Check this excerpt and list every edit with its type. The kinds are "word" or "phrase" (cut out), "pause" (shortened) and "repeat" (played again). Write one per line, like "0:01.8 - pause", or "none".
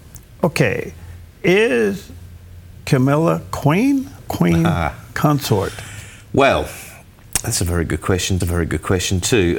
0:01.3 - pause
0:04.2 - word
0:08.4 - repeat